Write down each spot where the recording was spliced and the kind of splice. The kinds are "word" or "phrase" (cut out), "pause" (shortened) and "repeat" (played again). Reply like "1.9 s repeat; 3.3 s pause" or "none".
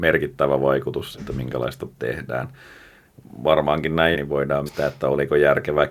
1.1 s word; 2.0 s word; 4.1 s word; 4.7 s word